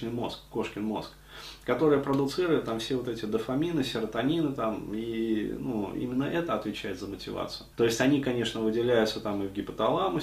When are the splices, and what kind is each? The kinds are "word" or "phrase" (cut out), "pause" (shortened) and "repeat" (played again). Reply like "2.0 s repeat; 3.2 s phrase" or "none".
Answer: 7.7 s pause